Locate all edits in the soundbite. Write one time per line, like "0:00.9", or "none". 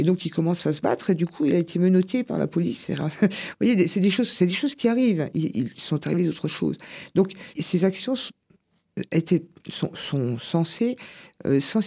0:05.7
0:07.5

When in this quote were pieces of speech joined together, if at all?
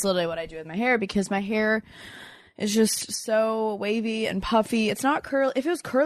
none

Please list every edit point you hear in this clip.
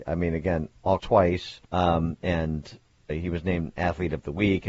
0:01.0
0:01.6
0:03.1

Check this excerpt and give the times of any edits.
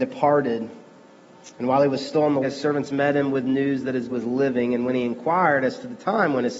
0:01.5
0:02.4
0:04.1

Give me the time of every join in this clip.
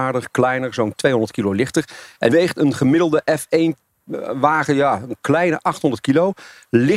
0:02.3

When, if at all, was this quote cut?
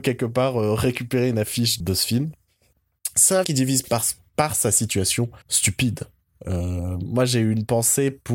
0:01.8
0:03.4
0:03.8
0:05.4

